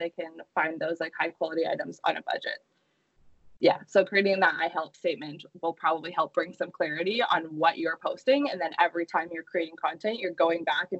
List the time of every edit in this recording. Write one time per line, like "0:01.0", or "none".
none

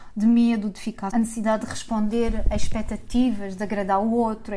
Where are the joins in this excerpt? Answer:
0:01.1

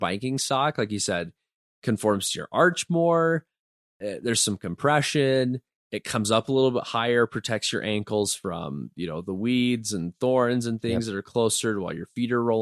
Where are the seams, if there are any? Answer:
none

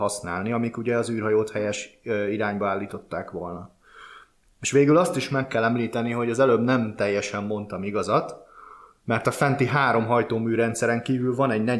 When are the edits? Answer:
none

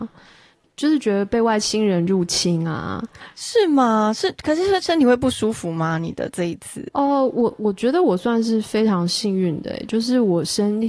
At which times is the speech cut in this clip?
none

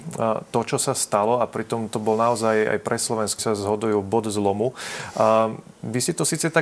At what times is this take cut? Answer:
0:03.4

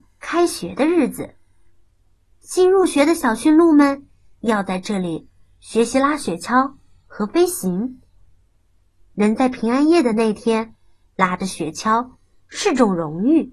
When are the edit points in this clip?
none

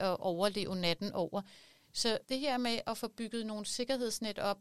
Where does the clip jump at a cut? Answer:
0:02.2

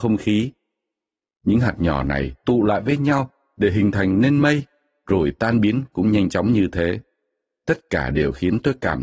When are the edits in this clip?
none

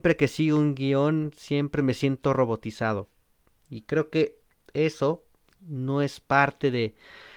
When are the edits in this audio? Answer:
none

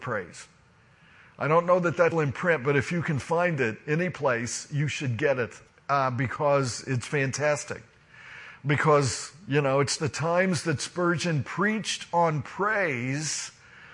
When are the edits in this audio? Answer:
0:02.1
0:05.7
0:10.0

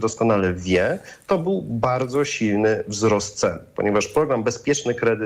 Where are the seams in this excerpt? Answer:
none

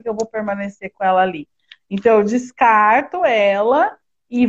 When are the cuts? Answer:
none

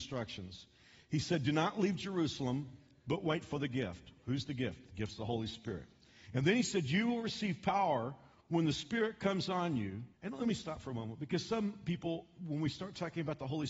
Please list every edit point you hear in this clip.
0:10.1

